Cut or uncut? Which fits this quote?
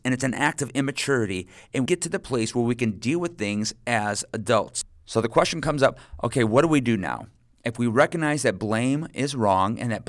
cut